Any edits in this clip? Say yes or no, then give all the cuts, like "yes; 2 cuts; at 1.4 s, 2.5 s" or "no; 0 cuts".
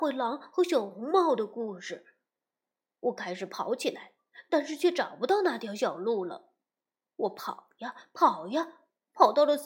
no; 0 cuts